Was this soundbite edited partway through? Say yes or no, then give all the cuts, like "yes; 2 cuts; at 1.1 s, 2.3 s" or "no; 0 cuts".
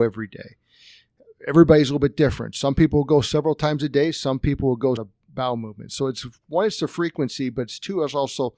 yes; 1 cut; at 5.0 s